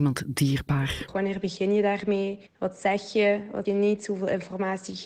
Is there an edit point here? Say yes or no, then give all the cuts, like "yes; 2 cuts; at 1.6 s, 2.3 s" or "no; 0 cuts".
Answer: yes; 2 cuts; at 2.5 s, 3.7 s